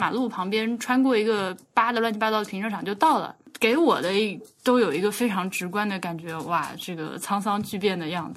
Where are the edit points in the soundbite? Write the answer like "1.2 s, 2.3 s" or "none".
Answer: none